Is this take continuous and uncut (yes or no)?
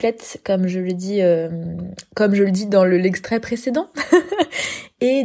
yes